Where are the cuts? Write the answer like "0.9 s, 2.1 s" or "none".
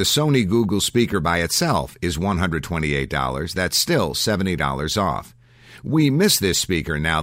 none